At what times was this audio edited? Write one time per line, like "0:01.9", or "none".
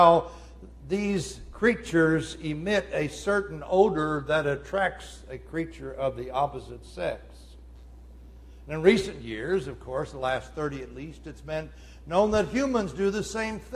none

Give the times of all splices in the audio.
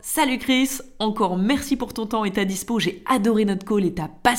none

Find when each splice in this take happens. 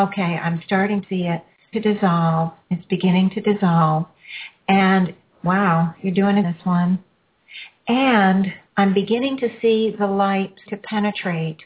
0:01.0
0:01.7
0:02.6
0:06.4
0:08.7
0:10.7

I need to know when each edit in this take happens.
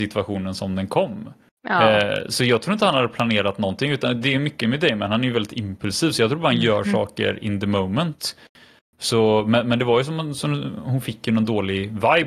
none

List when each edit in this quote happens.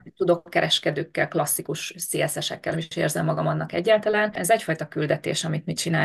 0:02.7

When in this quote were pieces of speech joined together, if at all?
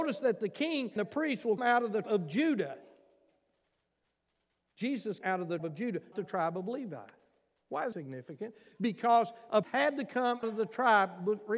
0:01.0
0:01.6
0:02.0
0:05.2
0:05.6
0:06.1
0:07.9
0:09.6
0:10.4

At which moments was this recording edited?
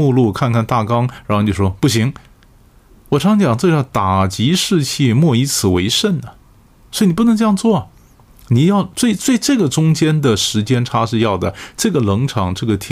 none

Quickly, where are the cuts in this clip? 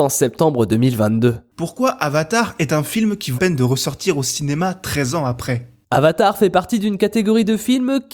0:03.4

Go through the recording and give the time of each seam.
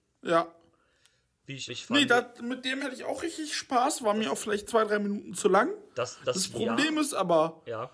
0:01.7
0:02.8

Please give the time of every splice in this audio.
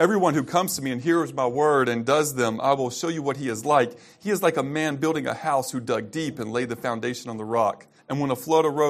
0:08.0

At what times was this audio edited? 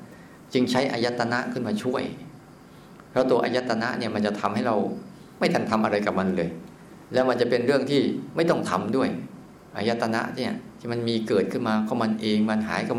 0:07.1

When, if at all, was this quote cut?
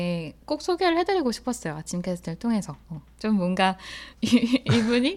0:02.8
0:04.1

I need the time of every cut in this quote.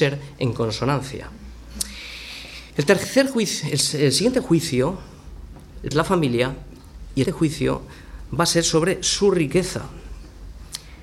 0:02.7
0:05.9
0:07.2

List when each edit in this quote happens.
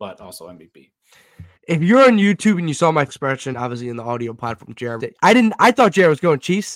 0:01.6
0:03.1
0:03.5
0:05.0

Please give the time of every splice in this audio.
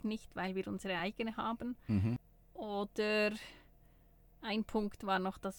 none

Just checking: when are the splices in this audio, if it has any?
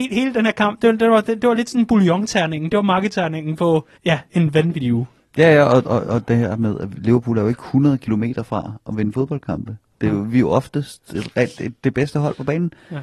0:04.0

